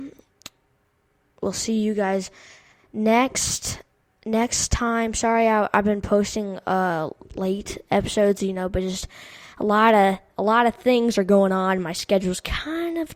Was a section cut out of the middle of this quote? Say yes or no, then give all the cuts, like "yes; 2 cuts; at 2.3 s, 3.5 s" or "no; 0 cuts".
no; 0 cuts